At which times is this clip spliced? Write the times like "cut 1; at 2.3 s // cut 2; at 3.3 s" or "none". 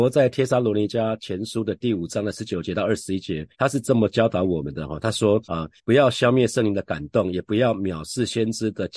cut 1; at 3.5 s // cut 2; at 5.4 s // cut 3; at 5.8 s